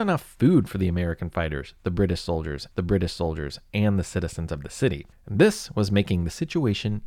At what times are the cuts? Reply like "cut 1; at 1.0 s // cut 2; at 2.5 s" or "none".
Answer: cut 1; at 2.7 s // cut 2; at 5.1 s